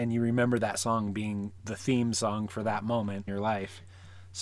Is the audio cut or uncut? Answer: cut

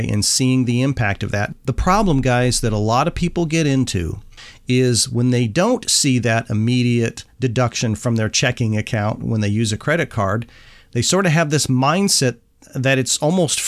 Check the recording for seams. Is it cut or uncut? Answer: uncut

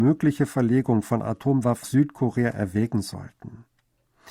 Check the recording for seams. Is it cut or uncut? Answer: cut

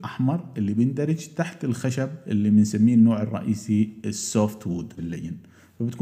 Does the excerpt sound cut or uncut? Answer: cut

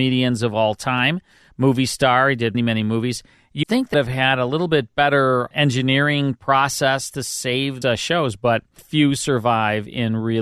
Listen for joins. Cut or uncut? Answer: cut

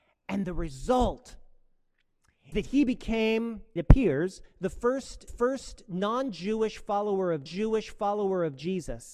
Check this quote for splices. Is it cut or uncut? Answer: cut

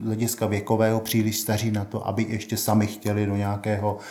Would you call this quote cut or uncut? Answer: uncut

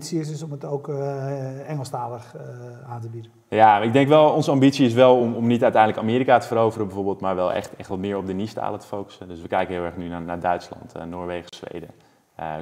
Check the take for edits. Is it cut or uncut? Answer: uncut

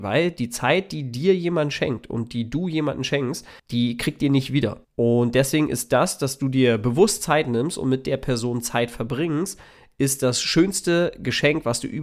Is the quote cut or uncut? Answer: cut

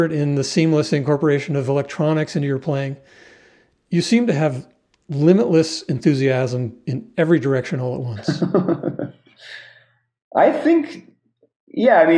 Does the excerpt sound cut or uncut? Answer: uncut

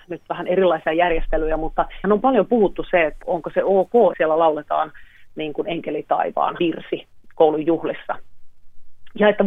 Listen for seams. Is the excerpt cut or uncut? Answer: cut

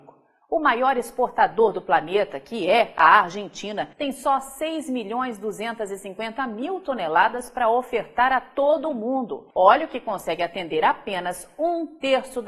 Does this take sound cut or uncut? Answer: cut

